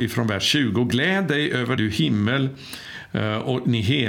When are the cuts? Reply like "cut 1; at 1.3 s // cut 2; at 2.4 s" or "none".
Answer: cut 1; at 1.8 s